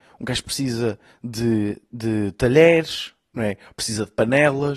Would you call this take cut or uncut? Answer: uncut